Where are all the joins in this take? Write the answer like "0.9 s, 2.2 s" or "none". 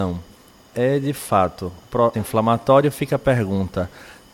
2.1 s